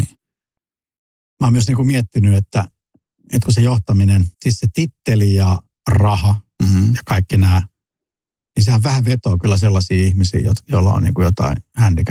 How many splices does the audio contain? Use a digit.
1